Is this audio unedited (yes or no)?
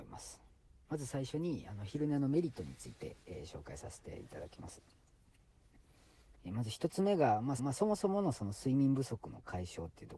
no